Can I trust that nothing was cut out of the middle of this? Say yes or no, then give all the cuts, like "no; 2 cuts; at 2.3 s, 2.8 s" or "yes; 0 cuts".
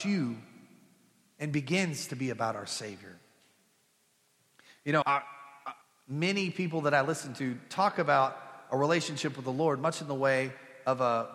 no; 2 cuts; at 5.0 s, 5.8 s